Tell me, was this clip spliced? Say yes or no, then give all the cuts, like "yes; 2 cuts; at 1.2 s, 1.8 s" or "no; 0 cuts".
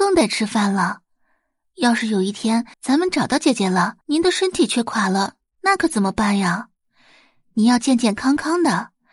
yes; 2 cuts; at 2.7 s, 4.0 s